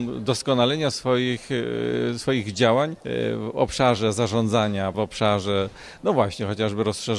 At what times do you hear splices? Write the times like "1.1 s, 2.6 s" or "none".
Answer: 0.9 s, 3.0 s, 4.9 s